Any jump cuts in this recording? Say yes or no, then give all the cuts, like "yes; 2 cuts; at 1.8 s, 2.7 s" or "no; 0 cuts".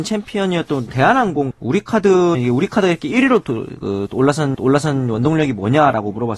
yes; 3 cuts; at 1.5 s, 2.3 s, 4.5 s